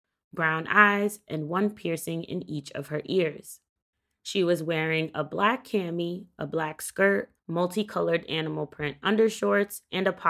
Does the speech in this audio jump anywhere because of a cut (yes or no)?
yes